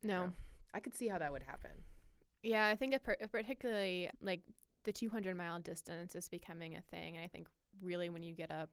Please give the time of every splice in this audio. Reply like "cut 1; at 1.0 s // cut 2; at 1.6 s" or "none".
none